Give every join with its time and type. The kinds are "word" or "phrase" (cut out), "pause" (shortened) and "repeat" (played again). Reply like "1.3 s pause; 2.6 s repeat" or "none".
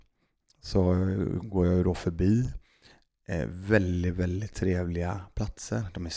1.4 s word